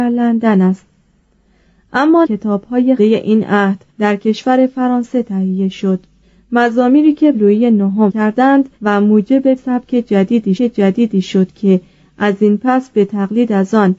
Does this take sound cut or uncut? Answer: cut